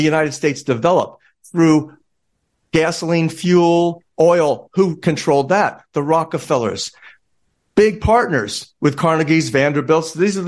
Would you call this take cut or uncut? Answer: uncut